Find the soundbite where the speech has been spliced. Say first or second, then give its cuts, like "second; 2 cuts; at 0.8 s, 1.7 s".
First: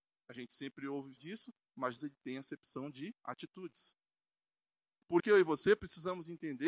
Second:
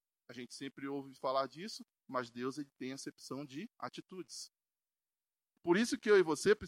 first; 3 cuts; at 1.2 s, 2.0 s, 5.2 s